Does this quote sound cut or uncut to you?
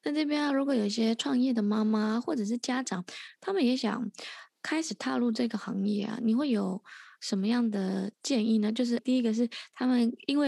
cut